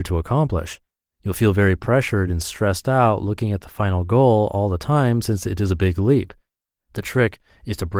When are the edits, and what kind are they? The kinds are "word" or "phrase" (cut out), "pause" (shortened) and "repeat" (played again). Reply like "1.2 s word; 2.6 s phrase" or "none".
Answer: none